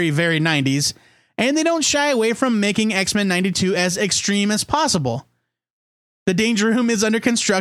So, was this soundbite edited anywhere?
no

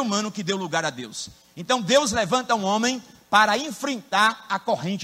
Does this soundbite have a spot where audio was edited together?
no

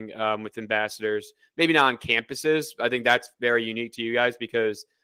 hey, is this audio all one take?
yes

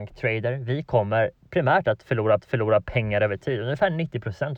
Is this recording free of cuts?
no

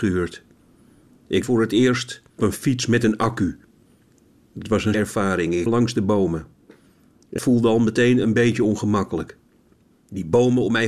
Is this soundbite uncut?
no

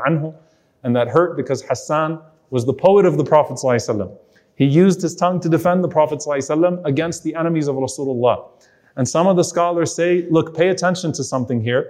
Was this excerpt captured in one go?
yes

